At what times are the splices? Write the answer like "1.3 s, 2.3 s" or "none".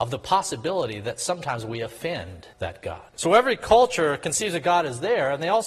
2.5 s, 3.1 s